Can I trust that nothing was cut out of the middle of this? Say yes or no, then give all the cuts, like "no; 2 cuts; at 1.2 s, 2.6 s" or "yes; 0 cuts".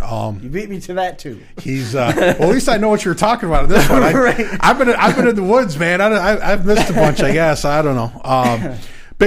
yes; 0 cuts